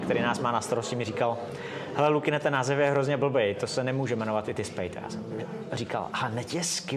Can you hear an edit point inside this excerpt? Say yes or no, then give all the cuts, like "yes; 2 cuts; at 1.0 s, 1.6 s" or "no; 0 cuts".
no; 0 cuts